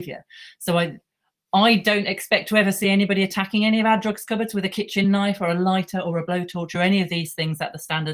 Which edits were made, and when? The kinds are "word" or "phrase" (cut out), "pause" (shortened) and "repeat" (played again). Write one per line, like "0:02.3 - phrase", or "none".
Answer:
none